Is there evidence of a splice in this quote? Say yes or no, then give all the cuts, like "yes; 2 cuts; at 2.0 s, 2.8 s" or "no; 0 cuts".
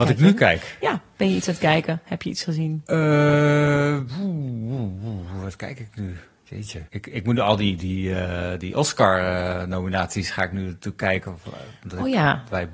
yes; 1 cut; at 6.9 s